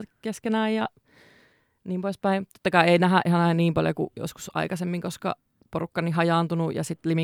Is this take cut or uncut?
uncut